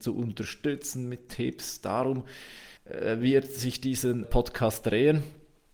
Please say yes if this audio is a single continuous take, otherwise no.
no